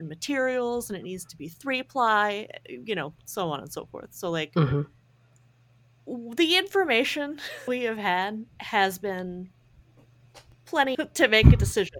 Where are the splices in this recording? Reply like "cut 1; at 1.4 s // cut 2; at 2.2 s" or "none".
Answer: cut 1; at 7.7 s // cut 2; at 8.5 s // cut 3; at 10.9 s